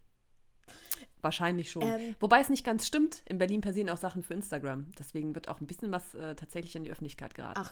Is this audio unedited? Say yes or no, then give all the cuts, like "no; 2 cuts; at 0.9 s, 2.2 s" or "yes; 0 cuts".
yes; 0 cuts